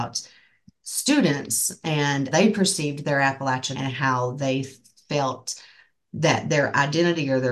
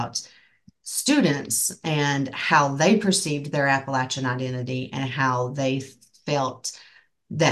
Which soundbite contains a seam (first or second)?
first